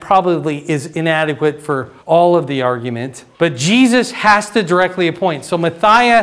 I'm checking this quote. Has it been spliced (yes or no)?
yes